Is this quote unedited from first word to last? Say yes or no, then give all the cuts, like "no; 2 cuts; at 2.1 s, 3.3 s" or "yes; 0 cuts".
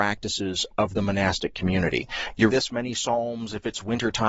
no; 1 cut; at 2.5 s